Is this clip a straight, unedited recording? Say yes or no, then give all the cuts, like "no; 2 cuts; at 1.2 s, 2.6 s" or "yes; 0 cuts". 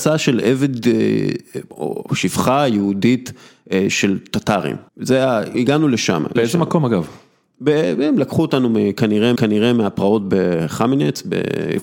no; 4 cuts; at 4.9 s, 5.5 s, 6.4 s, 9.4 s